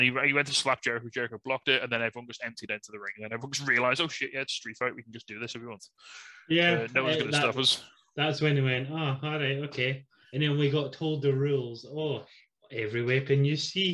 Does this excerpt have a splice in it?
no; 0 cuts

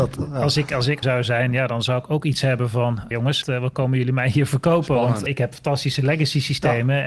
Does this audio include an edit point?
yes; 4 cuts; at 1.0 s, 3.1 s, 3.4 s, 5.3 s

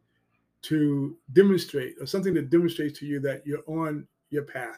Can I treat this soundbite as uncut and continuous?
yes; 0 cuts

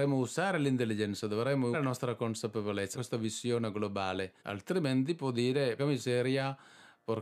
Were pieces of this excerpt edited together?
yes; 4 cuts; at 1.7 s, 2.9 s, 4.4 s, 5.8 s

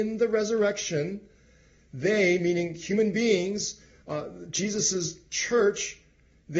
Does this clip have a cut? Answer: no; 0 cuts

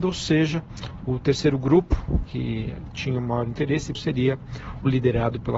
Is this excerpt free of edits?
no; 2 cuts; at 2.2 s, 4.0 s

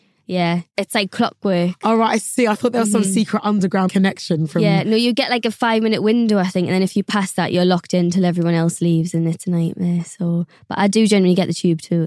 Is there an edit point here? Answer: yes; 1 cut; at 3.9 s

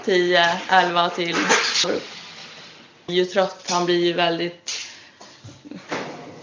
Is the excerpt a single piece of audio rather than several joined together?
no; 2 cuts; at 1.8 s, 3.1 s

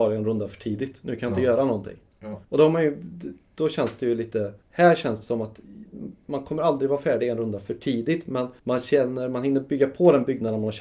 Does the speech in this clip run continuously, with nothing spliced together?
no; 2 cuts; at 2.4 s, 8.6 s

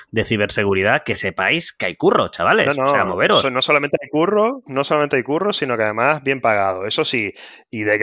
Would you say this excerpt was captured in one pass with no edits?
yes; 0 cuts

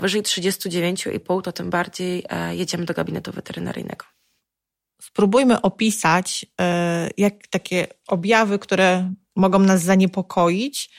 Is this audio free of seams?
yes; 0 cuts

